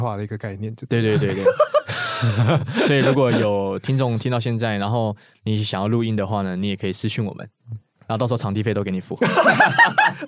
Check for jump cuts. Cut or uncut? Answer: uncut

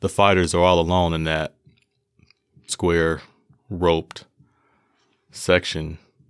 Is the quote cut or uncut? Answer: cut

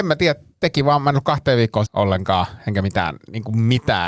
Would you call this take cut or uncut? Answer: cut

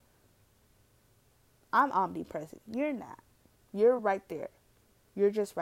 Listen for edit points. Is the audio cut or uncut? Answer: uncut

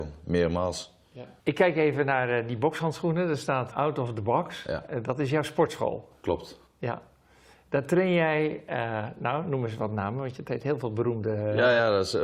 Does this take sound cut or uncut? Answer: cut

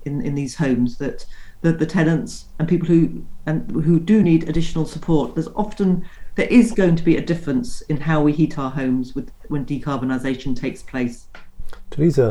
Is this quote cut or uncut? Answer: uncut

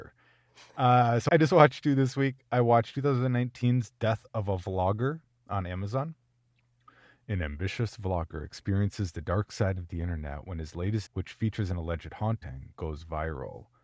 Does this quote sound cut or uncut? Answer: cut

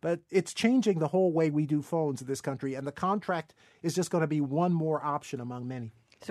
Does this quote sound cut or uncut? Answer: uncut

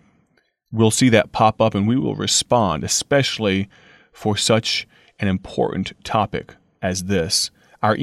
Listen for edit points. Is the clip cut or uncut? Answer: uncut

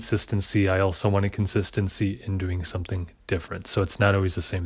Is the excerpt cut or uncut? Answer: uncut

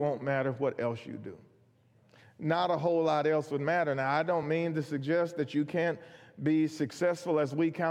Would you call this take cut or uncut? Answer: uncut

